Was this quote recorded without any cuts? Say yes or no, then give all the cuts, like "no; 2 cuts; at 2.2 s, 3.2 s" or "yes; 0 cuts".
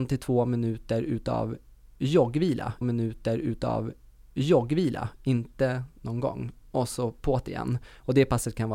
no; 1 cut; at 2.8 s